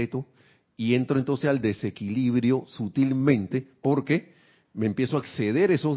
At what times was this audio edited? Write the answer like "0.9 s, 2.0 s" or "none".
none